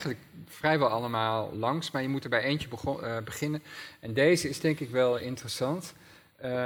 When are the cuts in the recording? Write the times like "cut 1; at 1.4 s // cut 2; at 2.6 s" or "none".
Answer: none